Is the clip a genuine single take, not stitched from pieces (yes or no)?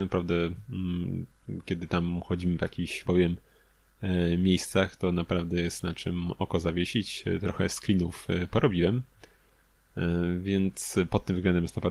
no